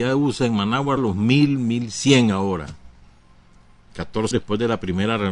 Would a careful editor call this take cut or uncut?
cut